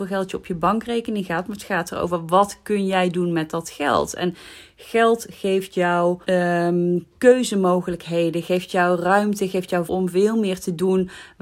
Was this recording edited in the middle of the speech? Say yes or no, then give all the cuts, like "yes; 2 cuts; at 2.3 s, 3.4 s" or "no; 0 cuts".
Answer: yes; 2 cuts; at 6.2 s, 9.9 s